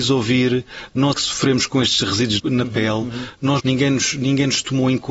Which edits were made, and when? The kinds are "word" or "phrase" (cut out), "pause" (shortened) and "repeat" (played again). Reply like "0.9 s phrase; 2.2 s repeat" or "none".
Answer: 1.1 s word; 2.4 s word; 3.6 s phrase